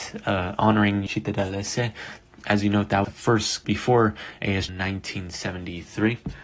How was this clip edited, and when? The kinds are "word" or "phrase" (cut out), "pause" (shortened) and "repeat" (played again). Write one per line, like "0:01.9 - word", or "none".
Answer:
0:01.1 - word
0:03.0 - word
0:03.6 - word
0:04.7 - word

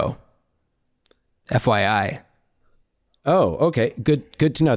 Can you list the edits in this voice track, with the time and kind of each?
none

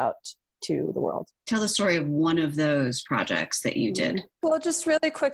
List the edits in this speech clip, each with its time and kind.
0:01.4 - pause
0:04.3 - pause

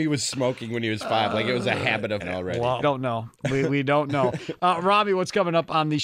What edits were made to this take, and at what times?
0:02.2 - word
0:02.8 - word

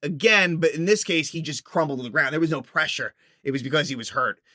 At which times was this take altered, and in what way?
none

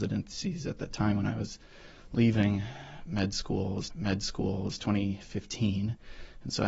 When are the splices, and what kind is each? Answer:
0:03.9 - repeat

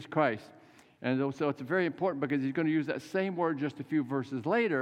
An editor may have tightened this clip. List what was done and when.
none

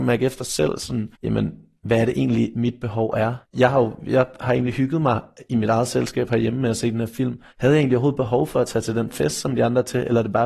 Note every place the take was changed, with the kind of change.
0:01.1 - pause
0:03.4 - pause
0:07.5 - pause

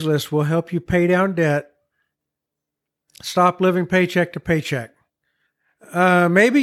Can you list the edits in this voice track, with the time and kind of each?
none

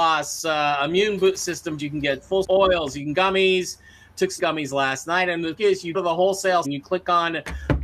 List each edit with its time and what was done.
0:01.8 - word
0:02.4 - word
0:03.1 - word
0:04.4 - word
0:05.6 - word
0:05.9 - word
0:06.6 - word

